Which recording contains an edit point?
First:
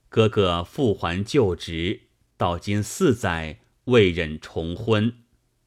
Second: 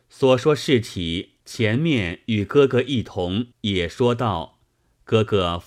second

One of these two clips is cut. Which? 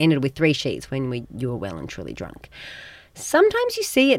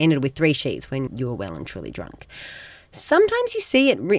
second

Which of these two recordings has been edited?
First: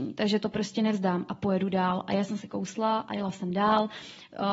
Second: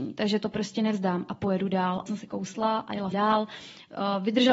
second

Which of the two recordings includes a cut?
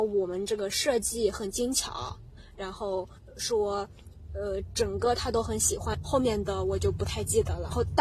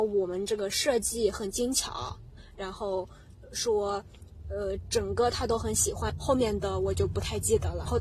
first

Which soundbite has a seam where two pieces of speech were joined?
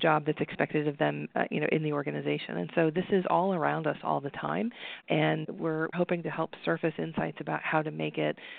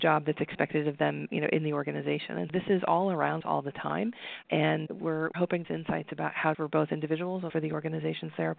second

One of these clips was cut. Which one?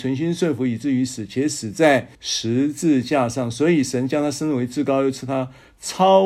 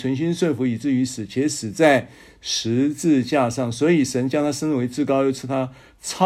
first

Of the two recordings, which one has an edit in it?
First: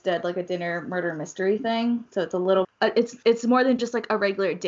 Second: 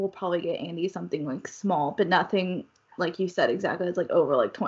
first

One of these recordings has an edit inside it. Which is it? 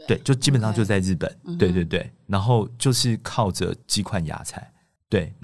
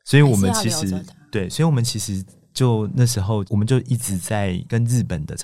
first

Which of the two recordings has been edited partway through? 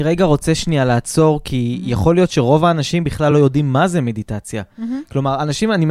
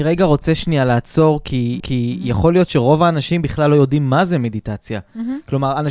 second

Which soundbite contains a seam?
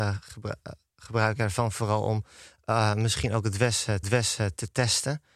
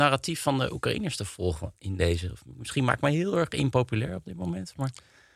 first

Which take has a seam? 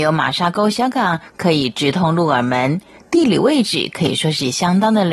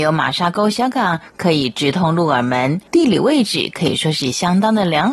second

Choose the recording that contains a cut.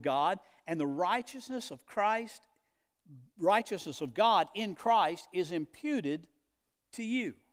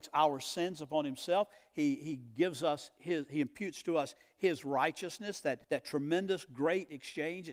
second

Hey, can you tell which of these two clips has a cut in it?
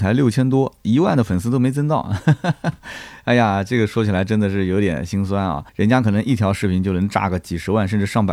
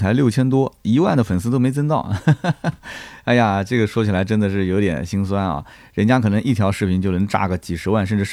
first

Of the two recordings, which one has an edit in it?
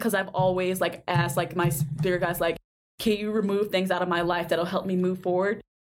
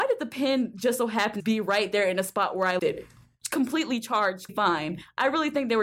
second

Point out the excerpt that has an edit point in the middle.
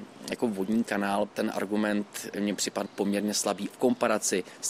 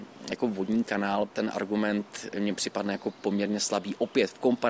first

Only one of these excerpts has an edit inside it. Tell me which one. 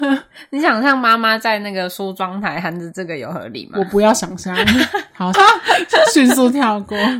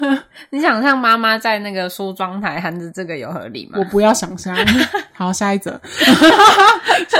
first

